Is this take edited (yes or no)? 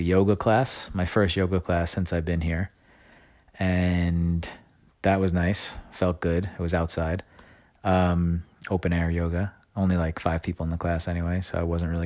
no